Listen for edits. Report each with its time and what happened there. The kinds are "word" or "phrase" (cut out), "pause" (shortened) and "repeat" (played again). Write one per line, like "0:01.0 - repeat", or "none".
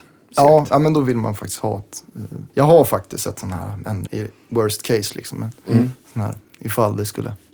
0:02.5 - pause
0:04.1 - word